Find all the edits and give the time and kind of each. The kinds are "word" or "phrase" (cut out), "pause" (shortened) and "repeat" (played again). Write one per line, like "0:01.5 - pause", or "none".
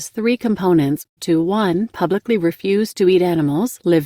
0:01.2 - phrase

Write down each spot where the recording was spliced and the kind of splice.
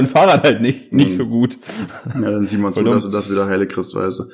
none

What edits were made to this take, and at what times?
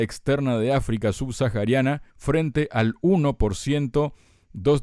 0:02.1 - pause

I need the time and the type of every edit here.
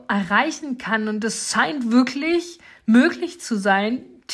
none

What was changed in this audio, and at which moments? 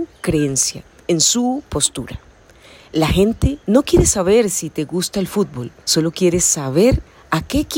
0:03.6 - pause
0:05.8 - pause

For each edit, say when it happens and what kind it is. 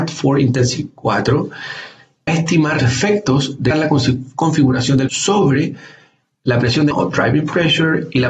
0:00.9 - word
0:02.3 - word
0:02.8 - word
0:03.7 - word
0:05.1 - word
0:06.9 - word

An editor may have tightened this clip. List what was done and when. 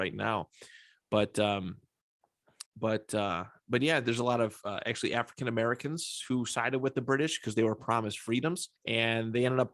0:02.7 - pause
0:08.8 - pause

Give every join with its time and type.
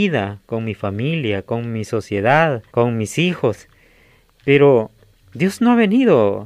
0:02.7 - pause
0:05.0 - pause

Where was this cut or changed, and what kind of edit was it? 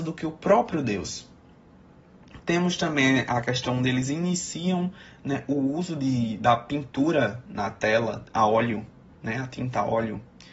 none

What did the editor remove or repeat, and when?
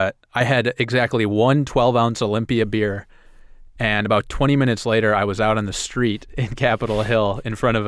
none

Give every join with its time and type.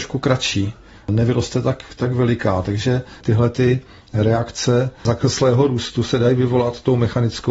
none

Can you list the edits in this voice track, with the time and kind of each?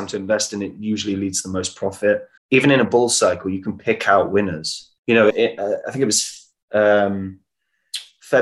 0:02.4 - pause
0:05.0 - pause
0:05.3 - word

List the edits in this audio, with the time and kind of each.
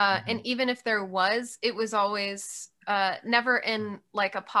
none

